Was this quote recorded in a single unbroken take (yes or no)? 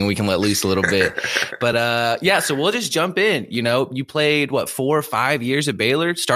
yes